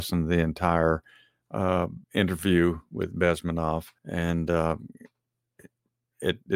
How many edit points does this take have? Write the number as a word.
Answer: two